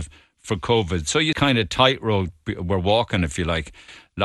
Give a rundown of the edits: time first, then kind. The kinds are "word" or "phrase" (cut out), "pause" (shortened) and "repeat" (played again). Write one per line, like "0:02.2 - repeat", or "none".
0:01.3 - phrase